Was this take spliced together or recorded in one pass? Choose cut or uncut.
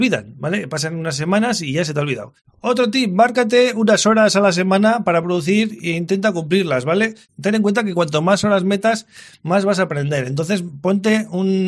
uncut